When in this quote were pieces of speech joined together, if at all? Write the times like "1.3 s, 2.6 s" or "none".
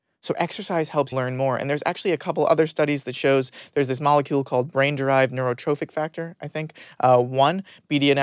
1.1 s